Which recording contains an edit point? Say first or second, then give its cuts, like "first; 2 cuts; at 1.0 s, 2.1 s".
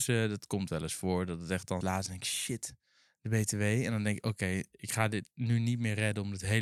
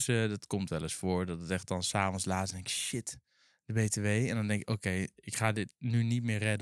first; 1 cut; at 1.8 s